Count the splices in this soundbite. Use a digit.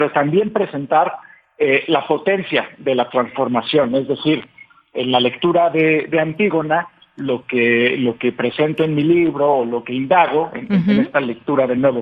0